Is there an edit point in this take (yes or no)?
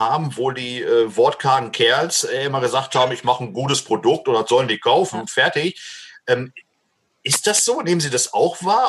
no